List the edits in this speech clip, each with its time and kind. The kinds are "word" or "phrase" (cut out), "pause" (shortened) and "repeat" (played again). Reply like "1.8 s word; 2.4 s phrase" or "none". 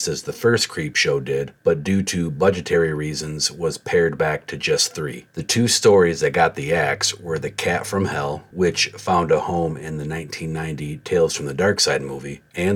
5.3 s pause